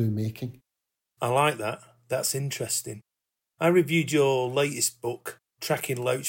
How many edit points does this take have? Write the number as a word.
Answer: zero